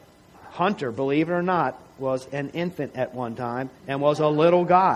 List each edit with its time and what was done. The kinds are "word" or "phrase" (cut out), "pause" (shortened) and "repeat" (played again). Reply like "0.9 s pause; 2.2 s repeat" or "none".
3.8 s pause